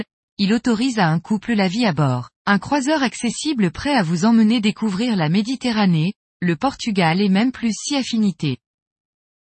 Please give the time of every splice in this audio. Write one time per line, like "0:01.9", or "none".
0:02.4